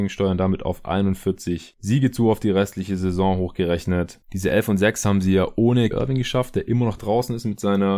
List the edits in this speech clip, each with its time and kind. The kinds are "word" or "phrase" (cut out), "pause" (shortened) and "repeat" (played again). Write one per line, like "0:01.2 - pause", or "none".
0:05.9 - word

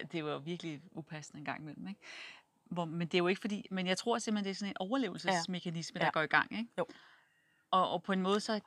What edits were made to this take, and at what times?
none

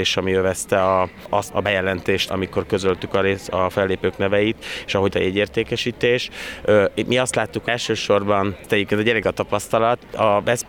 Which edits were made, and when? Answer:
0:01.5 - word
0:02.3 - word
0:05.1 - word
0:07.7 - word
0:09.2 - word

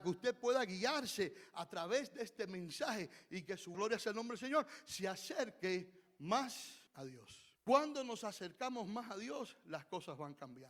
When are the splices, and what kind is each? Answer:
0:03.7 - word
0:06.9 - pause
0:07.6 - pause

